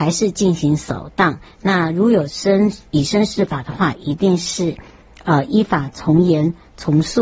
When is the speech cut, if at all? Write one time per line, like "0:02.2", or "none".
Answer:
none